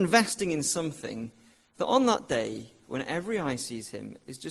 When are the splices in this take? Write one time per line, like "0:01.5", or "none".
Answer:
none